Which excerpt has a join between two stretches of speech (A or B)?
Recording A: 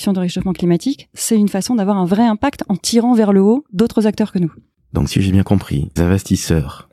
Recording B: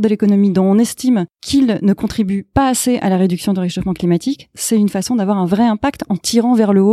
A